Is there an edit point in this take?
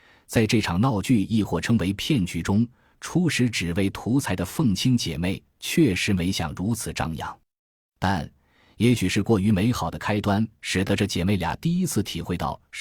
no; 0 cuts

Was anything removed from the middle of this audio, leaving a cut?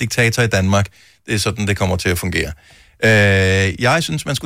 no; 0 cuts

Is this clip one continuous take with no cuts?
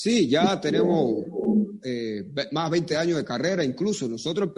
yes; 0 cuts

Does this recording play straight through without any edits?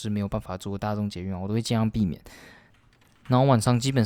yes; 0 cuts

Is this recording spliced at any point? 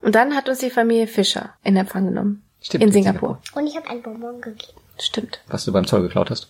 yes; 2 cuts; at 1.6 s, 3.8 s

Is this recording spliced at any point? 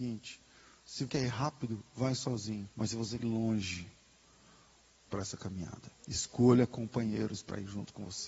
yes; 5 cuts; at 1.1 s, 2.7 s, 3.2 s, 5.1 s, 6.0 s

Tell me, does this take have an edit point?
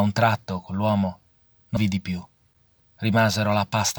yes; 1 cut; at 1.8 s

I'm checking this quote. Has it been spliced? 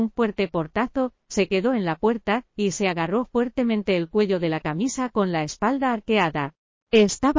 no; 0 cuts

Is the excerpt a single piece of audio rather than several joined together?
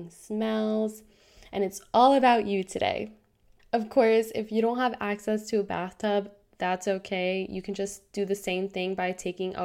yes; 0 cuts

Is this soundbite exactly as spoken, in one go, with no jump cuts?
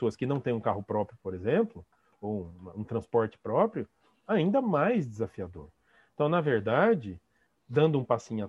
yes; 0 cuts

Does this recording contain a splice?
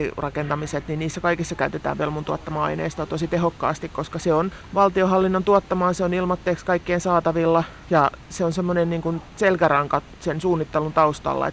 no; 0 cuts

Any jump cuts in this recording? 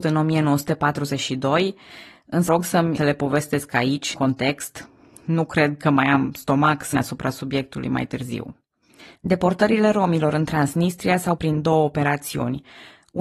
yes; 5 cuts; at 2.5 s, 3.0 s, 4.1 s, 6.9 s, 11.4 s

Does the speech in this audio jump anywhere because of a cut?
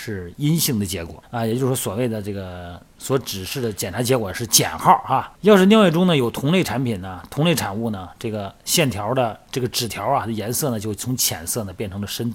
yes; 2 cuts; at 1.2 s, 5.4 s

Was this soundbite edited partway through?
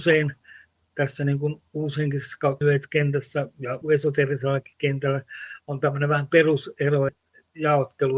yes; 3 cuts; at 2.6 s, 3.8 s, 7.1 s

